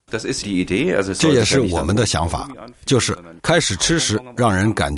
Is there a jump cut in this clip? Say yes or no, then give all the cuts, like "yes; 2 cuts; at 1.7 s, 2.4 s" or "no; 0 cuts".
yes; 1 cut; at 3.4 s